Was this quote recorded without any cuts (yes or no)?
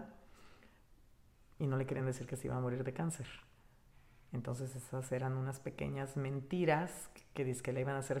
yes